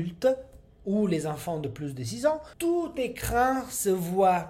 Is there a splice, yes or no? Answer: yes